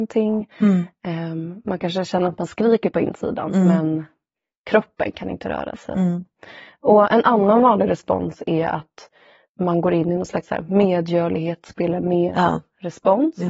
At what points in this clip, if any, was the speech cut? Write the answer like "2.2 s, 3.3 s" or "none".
none